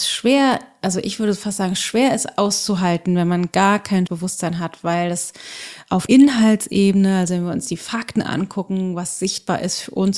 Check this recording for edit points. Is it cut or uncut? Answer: cut